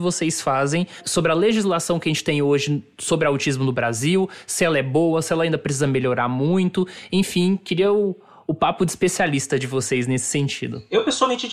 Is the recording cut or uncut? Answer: uncut